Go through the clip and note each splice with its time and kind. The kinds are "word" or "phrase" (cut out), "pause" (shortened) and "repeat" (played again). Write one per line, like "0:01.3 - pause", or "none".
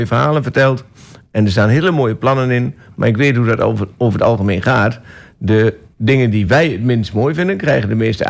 none